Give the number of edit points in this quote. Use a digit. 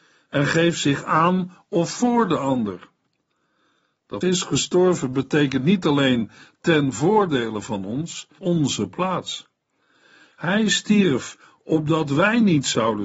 2